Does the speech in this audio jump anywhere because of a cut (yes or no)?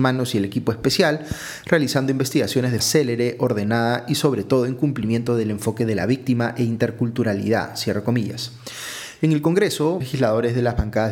yes